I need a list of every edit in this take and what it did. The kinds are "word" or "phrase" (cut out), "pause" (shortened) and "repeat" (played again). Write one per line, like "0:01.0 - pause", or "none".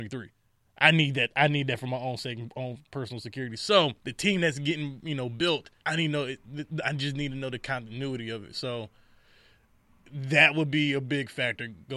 0:04.0 - pause
0:05.8 - pause